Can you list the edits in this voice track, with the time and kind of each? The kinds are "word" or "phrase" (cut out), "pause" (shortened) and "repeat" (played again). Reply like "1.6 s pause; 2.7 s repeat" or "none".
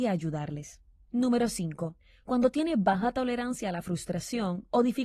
none